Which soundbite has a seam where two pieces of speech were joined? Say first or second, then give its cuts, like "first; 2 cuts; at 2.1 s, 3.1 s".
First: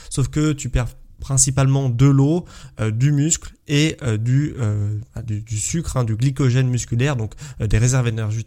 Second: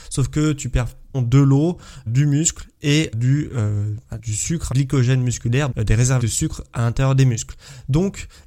second; 7 cuts; at 1.1 s, 2.1 s, 3.1 s, 4.2 s, 4.7 s, 5.7 s, 6.2 s